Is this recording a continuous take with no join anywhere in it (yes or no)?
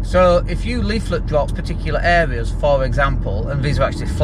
no